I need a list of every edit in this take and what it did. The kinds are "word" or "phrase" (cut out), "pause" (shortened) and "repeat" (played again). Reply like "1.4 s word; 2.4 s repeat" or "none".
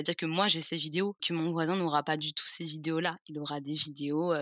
1.2 s word